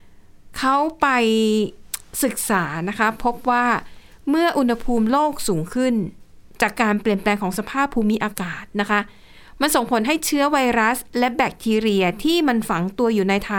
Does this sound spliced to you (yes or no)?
no